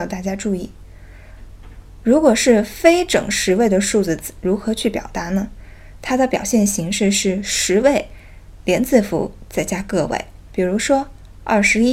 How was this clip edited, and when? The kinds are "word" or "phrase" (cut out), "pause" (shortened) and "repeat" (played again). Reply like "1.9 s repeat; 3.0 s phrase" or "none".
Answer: 10.4 s pause